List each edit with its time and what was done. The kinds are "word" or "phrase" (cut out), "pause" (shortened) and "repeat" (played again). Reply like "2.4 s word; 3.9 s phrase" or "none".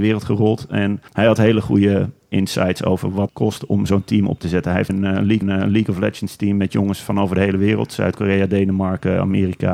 1.1 s pause; 3.3 s word; 4.9 s word; 5.4 s repeat